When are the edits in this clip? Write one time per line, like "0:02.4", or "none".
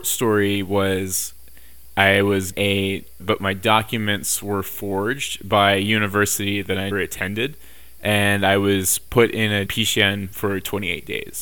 0:02.5
0:03.2
0:06.9
0:09.7